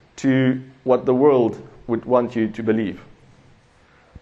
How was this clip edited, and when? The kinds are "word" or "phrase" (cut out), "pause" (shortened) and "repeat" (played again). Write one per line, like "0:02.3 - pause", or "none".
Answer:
none